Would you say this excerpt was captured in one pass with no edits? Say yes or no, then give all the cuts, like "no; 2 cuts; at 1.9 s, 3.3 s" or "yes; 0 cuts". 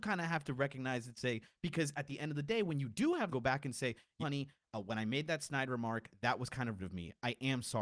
no; 3 cuts; at 3.3 s, 4.2 s, 6.8 s